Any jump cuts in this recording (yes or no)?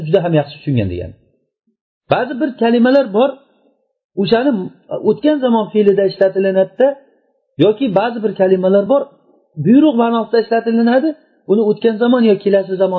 no